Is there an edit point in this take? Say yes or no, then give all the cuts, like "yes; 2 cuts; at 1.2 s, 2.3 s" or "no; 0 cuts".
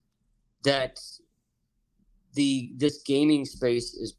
no; 0 cuts